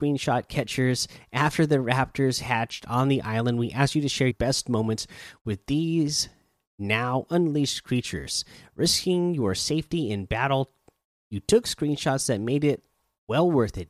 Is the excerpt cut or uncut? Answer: cut